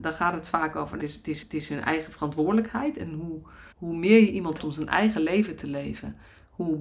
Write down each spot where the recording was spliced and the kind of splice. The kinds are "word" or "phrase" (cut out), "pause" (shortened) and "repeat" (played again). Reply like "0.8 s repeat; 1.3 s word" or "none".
1.0 s word; 1.4 s repeat; 3.7 s pause; 4.6 s word